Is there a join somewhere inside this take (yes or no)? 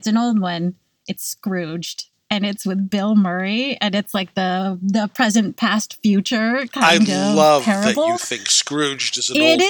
no